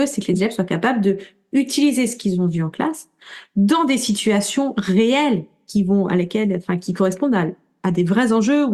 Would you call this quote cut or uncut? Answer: uncut